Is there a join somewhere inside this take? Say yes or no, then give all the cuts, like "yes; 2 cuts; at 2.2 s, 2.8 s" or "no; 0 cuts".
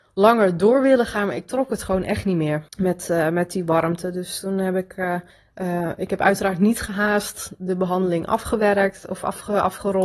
yes; 2 cuts; at 2.7 s, 5.3 s